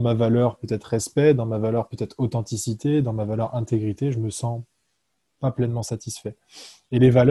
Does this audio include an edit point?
no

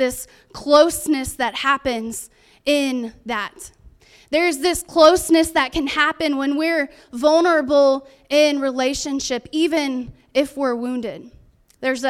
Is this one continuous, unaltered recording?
yes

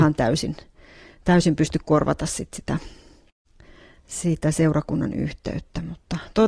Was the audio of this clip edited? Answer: no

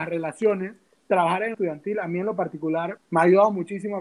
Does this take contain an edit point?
yes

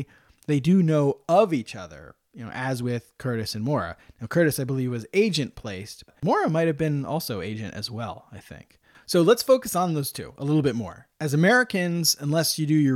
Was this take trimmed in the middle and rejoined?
no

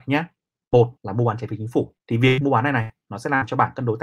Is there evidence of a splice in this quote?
yes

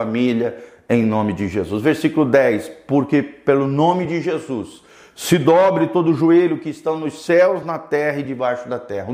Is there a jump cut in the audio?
no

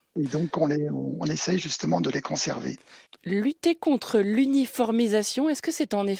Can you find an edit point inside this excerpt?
no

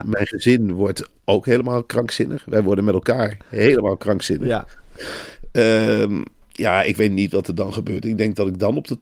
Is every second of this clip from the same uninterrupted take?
no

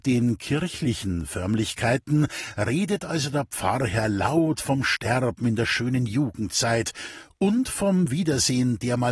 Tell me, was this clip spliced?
no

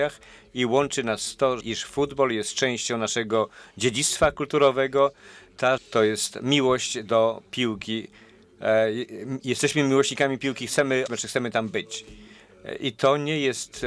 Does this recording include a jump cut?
yes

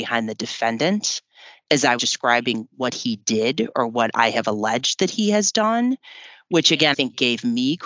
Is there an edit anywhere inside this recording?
yes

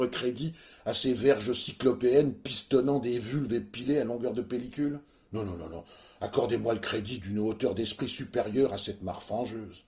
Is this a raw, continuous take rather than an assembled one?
yes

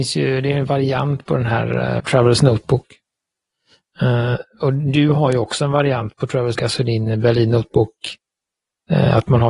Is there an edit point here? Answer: yes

